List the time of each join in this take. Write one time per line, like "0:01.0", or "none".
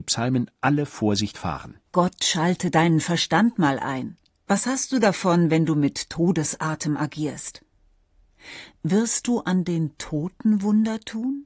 0:01.9